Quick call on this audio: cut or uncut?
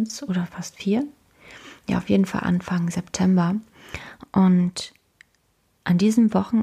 uncut